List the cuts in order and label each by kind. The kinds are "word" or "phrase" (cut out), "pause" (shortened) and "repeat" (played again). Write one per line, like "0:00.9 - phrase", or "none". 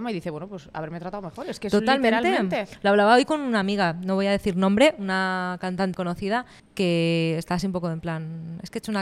0:05.9 - word
0:06.6 - pause